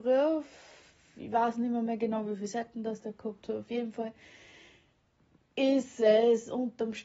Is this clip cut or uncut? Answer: uncut